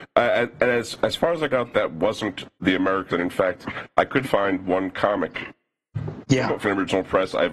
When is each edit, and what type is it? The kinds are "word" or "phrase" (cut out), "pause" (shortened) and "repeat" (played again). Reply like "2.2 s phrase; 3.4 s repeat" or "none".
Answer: 1.5 s phrase; 2.6 s pause; 3.1 s phrase; 4.2 s word; 6.6 s word